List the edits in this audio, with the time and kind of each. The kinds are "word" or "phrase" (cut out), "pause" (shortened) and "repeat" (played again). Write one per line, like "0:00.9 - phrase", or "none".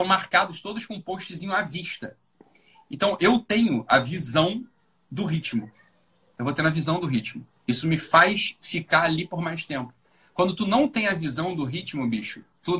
none